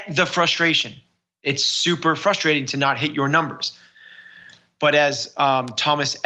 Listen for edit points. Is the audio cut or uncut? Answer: uncut